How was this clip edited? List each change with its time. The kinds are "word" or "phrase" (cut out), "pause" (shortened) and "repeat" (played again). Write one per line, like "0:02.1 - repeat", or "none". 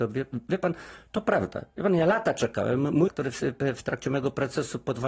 0:01.7 - pause
0:03.1 - word